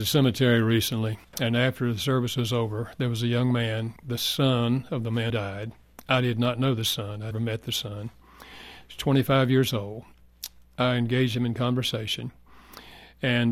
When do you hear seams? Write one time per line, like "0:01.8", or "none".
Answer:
0:01.2
0:04.0
0:05.3
0:07.3